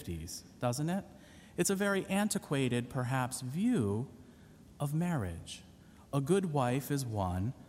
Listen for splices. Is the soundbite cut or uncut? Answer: uncut